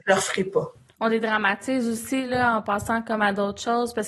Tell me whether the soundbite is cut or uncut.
uncut